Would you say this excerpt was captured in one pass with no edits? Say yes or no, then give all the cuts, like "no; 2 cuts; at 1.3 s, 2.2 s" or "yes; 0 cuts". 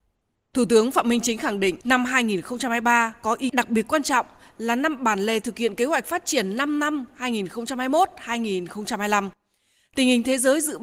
no; 2 cuts; at 1.8 s, 3.5 s